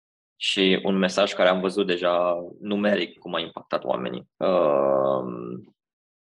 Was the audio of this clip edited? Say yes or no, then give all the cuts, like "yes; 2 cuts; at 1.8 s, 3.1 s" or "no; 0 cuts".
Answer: yes; 1 cut; at 4.3 s